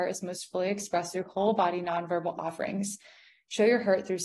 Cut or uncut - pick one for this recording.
uncut